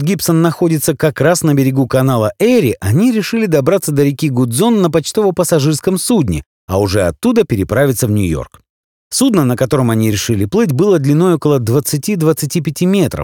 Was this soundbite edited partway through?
no; 0 cuts

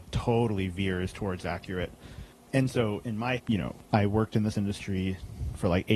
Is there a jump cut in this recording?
yes; 3 cuts; at 2.3 s, 3.4 s, 4.5 s

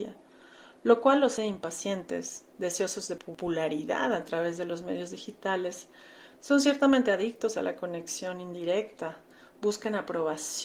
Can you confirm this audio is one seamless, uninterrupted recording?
no; 1 cut; at 1.4 s

